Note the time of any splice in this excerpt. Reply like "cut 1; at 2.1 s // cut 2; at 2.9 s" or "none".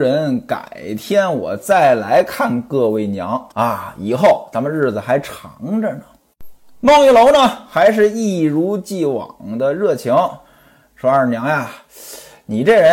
cut 1; at 3.5 s